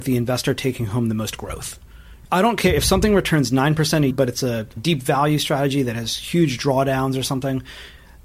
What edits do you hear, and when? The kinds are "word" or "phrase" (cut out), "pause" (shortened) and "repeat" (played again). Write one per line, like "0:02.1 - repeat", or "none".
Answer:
0:04.1 - word
0:04.8 - word